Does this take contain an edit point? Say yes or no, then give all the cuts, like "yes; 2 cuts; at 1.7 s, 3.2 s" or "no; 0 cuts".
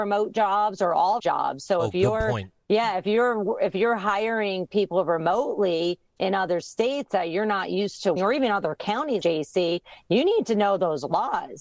yes; 4 cuts; at 1.2 s, 2.6 s, 8.2 s, 9.2 s